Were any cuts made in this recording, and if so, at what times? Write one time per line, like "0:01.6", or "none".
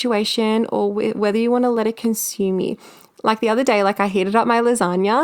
none